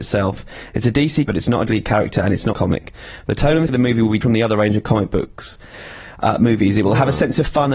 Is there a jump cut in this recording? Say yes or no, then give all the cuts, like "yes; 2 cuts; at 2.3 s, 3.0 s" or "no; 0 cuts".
yes; 5 cuts; at 1.3 s, 1.7 s, 2.5 s, 3.7 s, 4.2 s